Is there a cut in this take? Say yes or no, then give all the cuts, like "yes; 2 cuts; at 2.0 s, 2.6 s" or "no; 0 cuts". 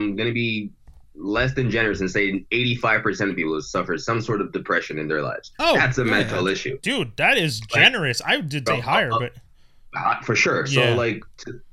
yes; 1 cut; at 8.7 s